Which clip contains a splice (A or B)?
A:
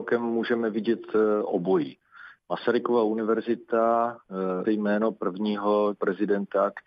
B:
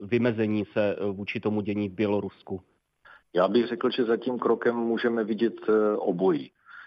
A